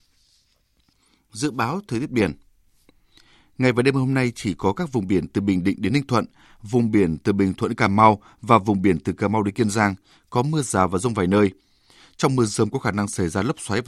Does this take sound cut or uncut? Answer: uncut